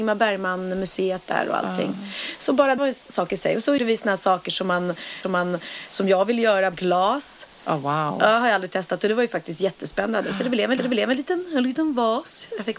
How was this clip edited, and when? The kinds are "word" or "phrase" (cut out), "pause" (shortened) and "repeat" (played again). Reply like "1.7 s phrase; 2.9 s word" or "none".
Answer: 2.8 s word; 3.8 s word; 5.2 s repeat; 6.7 s word; 10.8 s repeat